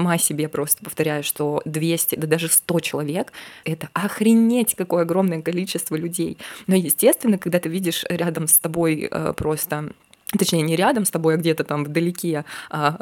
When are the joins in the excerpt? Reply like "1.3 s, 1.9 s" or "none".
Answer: 3.6 s

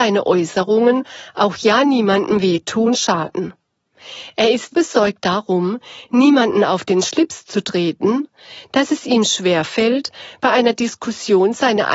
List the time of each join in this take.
2.9 s, 4.7 s

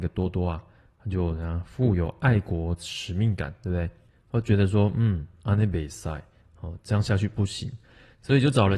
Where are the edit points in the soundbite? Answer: none

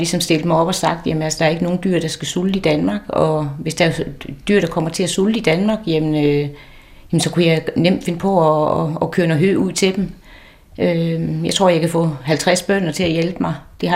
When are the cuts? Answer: none

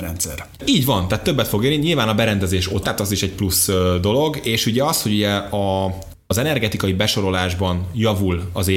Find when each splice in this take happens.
2.8 s

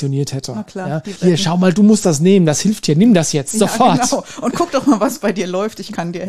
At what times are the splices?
1.2 s

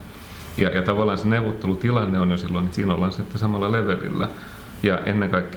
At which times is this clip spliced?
2.7 s

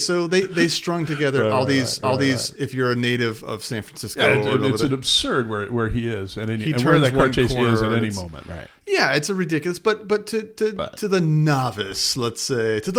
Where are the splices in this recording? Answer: 2.0 s

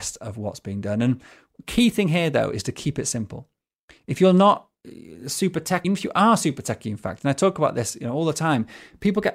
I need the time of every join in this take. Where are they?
5.8 s

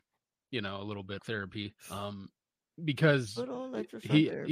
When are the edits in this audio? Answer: 1.2 s, 1.8 s

